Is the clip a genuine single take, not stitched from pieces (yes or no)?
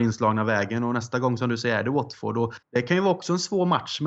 no